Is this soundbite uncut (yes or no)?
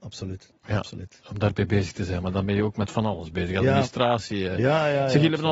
yes